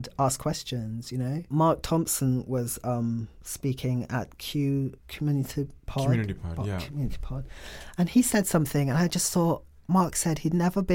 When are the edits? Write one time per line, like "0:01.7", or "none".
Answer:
0:05.0